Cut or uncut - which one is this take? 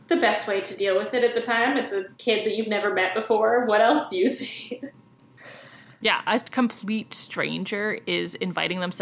uncut